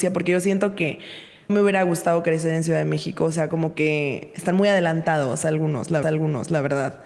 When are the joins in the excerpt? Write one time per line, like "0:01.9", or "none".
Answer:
0:01.5
0:06.0